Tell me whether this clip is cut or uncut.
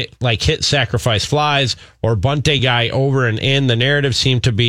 uncut